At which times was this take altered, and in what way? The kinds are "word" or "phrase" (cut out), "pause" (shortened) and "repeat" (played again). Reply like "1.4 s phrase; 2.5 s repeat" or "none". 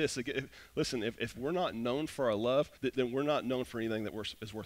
2.8 s pause